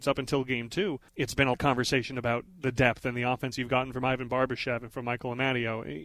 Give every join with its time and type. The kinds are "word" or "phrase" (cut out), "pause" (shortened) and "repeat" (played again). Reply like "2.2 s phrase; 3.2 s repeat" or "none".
1.1 s pause; 1.5 s word